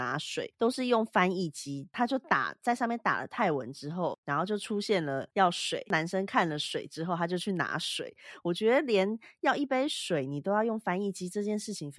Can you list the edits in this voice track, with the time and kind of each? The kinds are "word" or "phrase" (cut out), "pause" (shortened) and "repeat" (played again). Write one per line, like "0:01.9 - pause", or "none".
0:05.3 - pause